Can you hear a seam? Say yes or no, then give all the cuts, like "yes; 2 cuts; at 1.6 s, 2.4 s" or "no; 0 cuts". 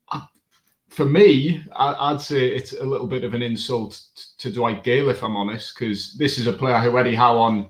no; 0 cuts